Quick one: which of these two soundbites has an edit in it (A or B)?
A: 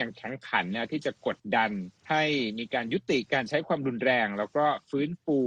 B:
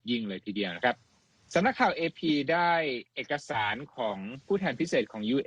A